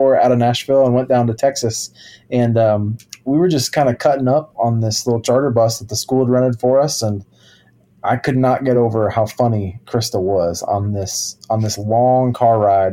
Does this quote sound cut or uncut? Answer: uncut